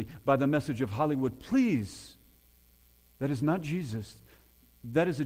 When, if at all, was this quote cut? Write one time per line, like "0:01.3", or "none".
none